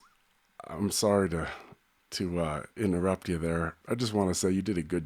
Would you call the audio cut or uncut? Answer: cut